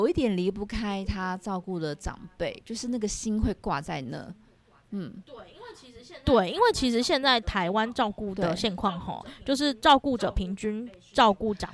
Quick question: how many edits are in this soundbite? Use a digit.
0